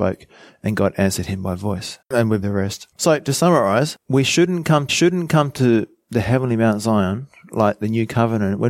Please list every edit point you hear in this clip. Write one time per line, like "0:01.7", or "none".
0:02.0
0:02.4
0:02.9
0:04.0
0:04.9

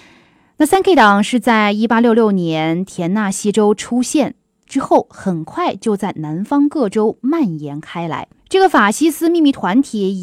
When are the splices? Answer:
0:04.5
0:08.4

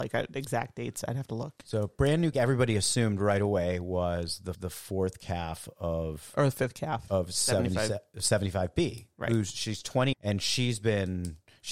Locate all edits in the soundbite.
0:02.3
0:04.5
0:07.1
0:10.1

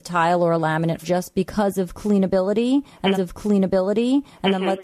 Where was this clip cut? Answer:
0:01.0
0:03.1

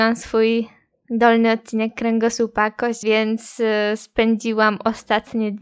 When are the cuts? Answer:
0:03.0

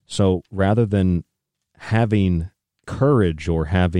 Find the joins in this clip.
0:02.8

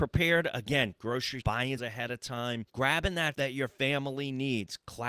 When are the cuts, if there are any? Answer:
0:01.4
0:01.8
0:02.7
0:03.3

